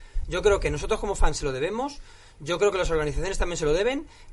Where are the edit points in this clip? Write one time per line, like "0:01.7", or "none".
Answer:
none

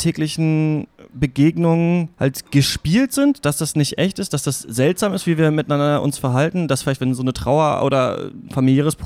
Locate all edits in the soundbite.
0:02.1

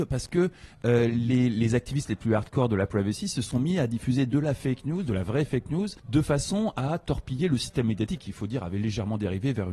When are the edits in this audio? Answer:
0:06.0

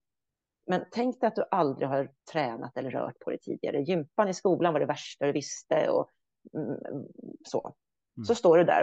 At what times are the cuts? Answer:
0:02.2

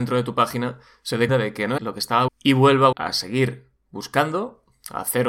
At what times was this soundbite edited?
0:01.3
0:01.8
0:02.3
0:02.9

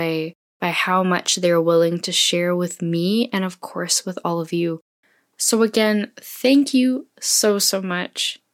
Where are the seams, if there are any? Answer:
none

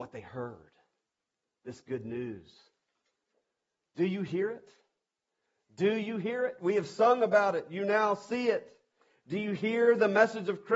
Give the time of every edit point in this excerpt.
none

